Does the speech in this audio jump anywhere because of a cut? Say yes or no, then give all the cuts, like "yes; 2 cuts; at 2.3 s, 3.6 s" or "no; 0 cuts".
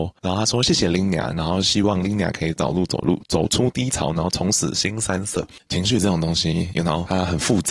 no; 0 cuts